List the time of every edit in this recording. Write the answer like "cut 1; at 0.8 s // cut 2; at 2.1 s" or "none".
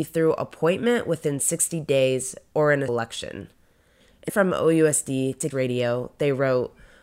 cut 1; at 2.9 s // cut 2; at 4.3 s // cut 3; at 5.5 s